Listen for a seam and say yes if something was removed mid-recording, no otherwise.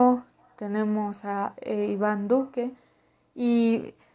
no